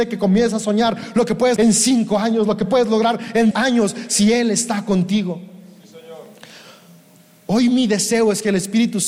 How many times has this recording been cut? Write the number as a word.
two